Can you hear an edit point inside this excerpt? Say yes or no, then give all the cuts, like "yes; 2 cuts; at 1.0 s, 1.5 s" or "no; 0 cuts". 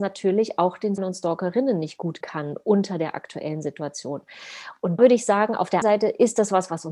yes; 4 cuts; at 1.0 s, 2.2 s, 5.0 s, 5.8 s